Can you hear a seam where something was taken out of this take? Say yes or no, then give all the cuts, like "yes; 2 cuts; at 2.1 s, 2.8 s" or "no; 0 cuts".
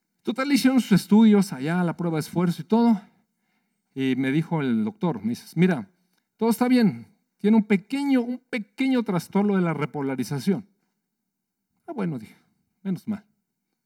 no; 0 cuts